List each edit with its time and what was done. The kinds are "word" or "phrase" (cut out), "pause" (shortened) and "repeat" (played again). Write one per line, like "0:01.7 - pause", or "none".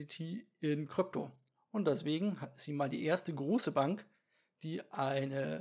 none